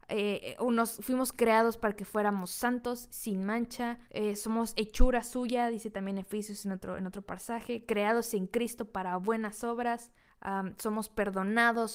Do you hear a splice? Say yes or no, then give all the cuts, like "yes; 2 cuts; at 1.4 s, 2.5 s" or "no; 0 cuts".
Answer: yes; 2 cuts; at 4.0 s, 10.3 s